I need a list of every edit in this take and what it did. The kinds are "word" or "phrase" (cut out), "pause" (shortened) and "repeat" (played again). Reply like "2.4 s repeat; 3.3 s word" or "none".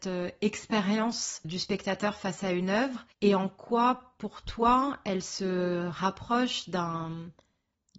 1.4 s word; 3.1 s pause